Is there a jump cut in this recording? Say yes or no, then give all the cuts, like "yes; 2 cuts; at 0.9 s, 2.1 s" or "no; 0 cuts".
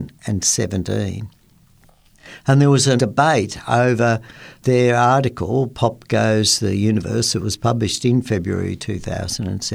yes; 2 cuts; at 3.0 s, 4.6 s